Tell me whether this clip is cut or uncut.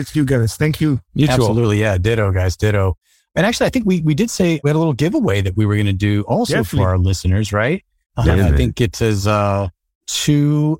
cut